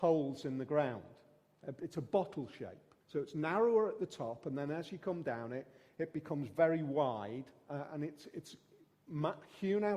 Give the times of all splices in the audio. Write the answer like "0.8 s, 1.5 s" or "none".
3.0 s